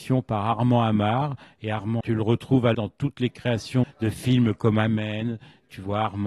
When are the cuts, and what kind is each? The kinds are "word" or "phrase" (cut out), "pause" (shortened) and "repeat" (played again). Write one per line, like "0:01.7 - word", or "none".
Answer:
0:02.0 - word
0:02.7 - phrase
0:03.8 - word